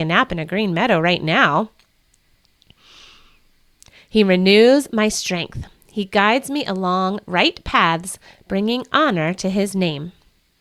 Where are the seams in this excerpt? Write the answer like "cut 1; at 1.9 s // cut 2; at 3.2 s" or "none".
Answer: none